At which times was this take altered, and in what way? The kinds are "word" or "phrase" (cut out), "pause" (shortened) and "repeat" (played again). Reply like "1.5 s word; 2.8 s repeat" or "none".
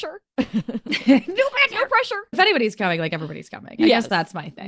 2.3 s word